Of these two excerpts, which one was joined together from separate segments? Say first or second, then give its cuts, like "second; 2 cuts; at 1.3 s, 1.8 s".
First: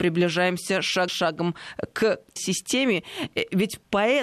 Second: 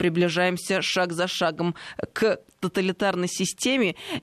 first; 2 cuts; at 1.1 s, 2.4 s